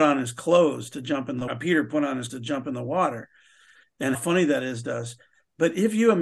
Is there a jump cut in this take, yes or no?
yes